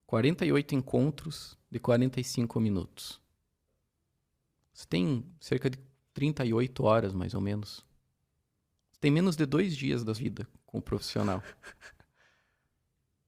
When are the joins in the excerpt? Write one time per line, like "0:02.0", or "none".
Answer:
0:10.1